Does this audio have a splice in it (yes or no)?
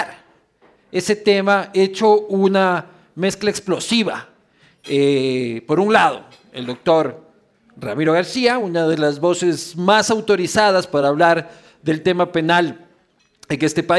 no